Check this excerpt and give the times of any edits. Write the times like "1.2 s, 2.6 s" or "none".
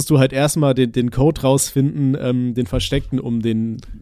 none